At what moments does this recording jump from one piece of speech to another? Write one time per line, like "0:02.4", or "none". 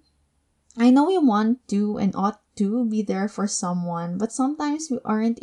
none